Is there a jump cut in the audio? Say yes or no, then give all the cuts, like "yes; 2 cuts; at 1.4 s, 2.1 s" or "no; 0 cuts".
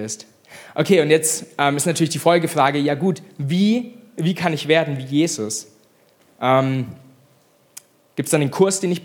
no; 0 cuts